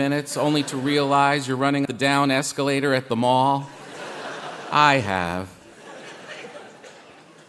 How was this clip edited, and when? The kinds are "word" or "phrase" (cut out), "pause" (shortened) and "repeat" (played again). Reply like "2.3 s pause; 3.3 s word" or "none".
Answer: 1.9 s word